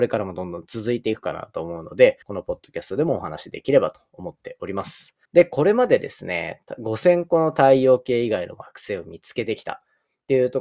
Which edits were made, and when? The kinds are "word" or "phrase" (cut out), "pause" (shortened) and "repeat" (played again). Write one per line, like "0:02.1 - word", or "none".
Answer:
0:02.2 - pause
0:05.3 - pause

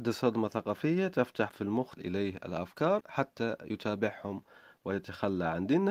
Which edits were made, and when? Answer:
0:01.5 - word
0:02.0 - word
0:03.0 - word

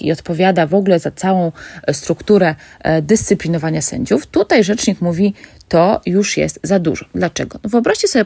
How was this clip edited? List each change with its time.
none

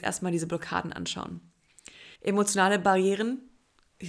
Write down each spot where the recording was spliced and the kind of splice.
0:02.2 - pause

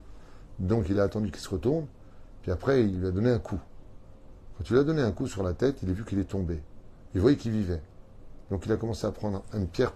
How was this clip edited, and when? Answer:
none

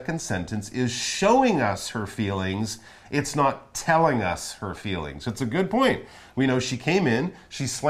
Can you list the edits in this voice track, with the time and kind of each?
none

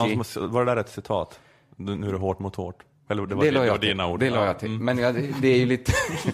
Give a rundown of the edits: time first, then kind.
none

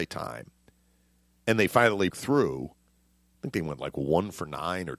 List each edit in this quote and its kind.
0:02.1 - word

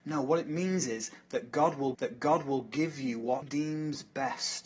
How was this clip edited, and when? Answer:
0:01.9 - repeat
0:03.4 - word

